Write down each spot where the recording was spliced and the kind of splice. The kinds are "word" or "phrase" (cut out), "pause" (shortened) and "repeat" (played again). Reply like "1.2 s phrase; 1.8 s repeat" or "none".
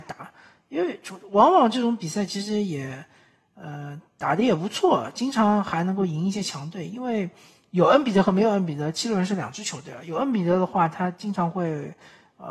none